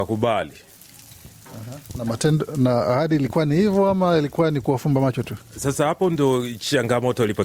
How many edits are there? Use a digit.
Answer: 0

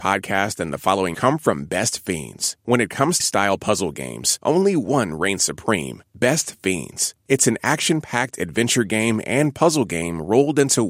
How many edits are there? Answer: 2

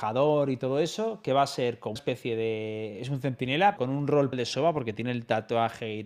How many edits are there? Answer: 3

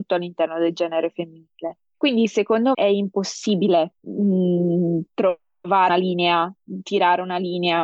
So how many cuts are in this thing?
3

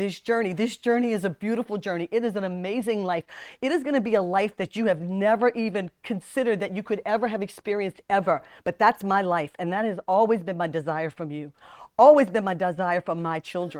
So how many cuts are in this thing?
0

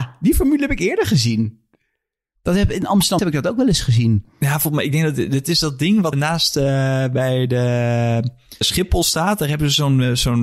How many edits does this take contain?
3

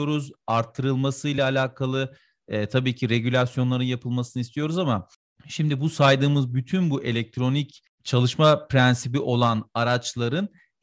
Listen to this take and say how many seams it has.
0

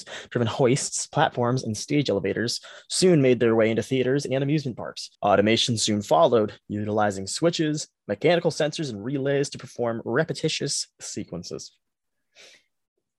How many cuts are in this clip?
1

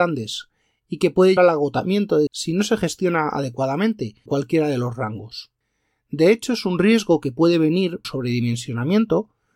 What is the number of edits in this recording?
4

